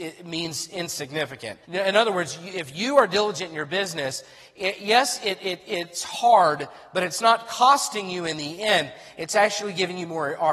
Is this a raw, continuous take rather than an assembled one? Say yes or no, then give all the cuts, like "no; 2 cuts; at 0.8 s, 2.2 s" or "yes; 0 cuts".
no; 1 cut; at 1.6 s